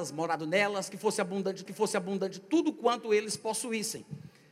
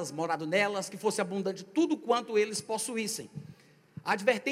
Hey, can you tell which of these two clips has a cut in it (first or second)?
first